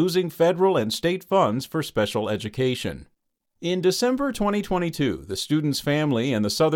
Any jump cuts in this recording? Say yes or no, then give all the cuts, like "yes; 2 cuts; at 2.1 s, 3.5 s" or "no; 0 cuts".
no; 0 cuts